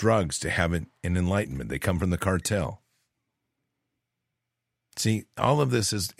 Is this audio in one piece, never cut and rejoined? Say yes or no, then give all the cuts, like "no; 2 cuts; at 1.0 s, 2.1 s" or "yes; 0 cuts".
yes; 0 cuts